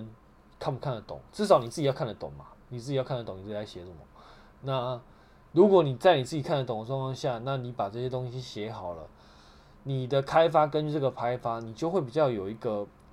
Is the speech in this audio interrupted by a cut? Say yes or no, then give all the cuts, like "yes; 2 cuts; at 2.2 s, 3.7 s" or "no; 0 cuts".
no; 0 cuts